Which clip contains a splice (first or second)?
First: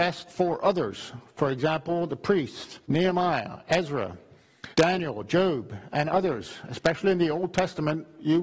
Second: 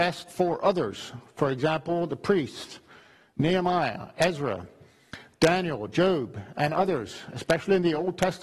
first